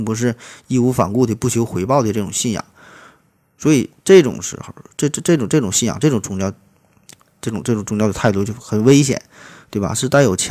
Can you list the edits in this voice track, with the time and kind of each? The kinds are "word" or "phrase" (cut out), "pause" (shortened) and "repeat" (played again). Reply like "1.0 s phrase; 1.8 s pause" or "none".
none